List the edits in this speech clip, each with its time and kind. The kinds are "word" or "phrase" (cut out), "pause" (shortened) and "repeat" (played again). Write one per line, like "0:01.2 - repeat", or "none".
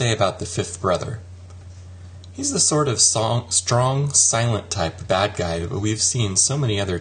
none